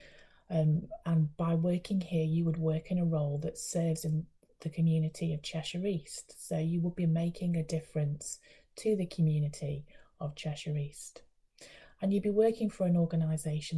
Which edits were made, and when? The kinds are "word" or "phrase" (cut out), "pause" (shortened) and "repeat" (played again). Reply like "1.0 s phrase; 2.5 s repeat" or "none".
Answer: none

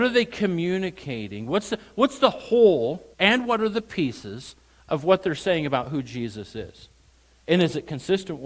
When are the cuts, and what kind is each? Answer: 3.1 s pause

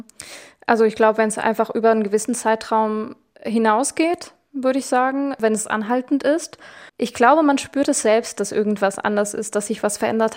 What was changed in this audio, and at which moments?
6.9 s pause

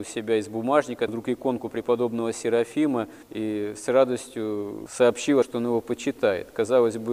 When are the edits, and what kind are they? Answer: 1.1 s phrase; 3.2 s pause; 5.4 s phrase

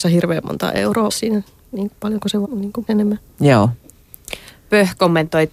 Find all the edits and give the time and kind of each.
1.1 s word; 1.9 s word; 2.4 s word; 2.9 s word

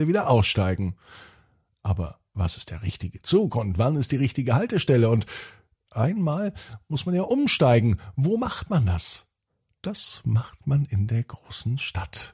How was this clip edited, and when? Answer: none

